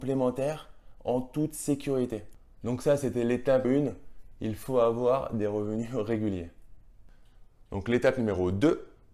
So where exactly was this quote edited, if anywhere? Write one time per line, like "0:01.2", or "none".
0:03.6